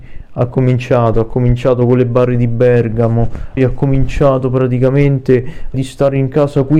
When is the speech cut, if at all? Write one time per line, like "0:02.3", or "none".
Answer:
0:03.6
0:05.7